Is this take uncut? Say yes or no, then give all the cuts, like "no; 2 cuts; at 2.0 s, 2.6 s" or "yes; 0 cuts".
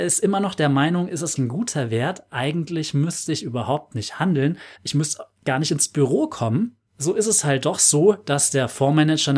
no; 3 cuts; at 1.4 s, 4.7 s, 6.9 s